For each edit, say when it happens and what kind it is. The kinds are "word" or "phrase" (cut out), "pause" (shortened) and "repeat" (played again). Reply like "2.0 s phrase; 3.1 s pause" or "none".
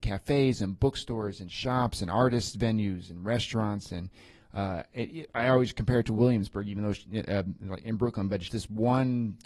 8.5 s word